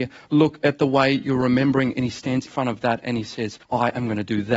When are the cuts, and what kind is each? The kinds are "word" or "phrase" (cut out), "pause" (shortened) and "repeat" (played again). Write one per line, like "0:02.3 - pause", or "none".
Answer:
0:02.5 - word
0:03.6 - pause